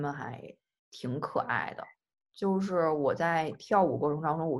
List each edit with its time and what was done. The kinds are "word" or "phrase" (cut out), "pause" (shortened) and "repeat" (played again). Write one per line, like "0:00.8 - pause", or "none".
none

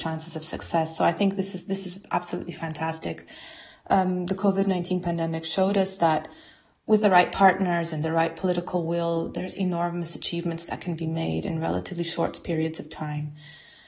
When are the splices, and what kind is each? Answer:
none

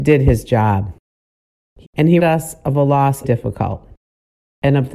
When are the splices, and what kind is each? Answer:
0:01.8 - word
0:02.2 - word
0:03.2 - word

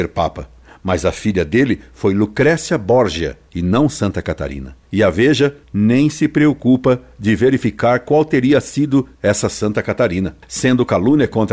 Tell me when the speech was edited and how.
0:04.8 - pause
0:05.6 - pause
0:09.1 - pause

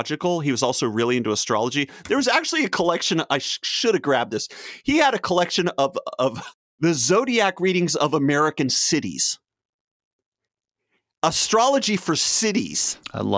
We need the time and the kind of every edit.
none

